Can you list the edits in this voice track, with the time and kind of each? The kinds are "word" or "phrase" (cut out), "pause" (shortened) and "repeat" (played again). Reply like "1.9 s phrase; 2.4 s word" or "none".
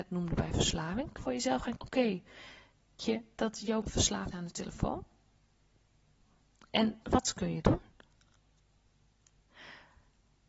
1.2 s word; 1.8 s word; 3.0 s word; 3.8 s word; 4.3 s word; 7.0 s word; 7.6 s word